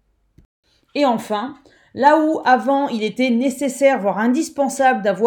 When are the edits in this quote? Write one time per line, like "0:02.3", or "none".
none